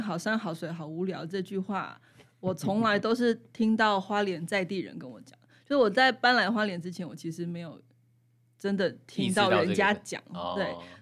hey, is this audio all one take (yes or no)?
yes